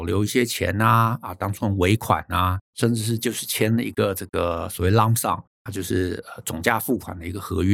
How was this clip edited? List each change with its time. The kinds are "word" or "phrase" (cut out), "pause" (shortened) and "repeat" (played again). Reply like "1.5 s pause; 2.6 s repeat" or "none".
2.6 s pause; 5.5 s pause